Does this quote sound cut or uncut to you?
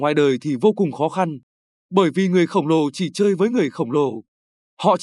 uncut